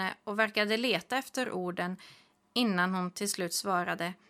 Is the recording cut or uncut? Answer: uncut